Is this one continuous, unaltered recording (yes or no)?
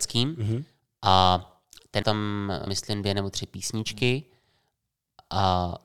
no